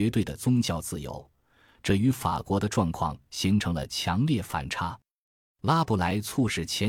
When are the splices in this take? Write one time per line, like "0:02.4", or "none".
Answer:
none